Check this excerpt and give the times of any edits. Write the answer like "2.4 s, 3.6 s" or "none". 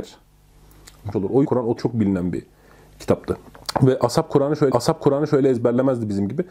1.1 s, 1.4 s, 1.8 s, 4.7 s